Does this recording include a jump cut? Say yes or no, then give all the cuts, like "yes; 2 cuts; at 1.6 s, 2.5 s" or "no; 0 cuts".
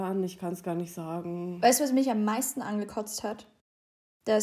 no; 0 cuts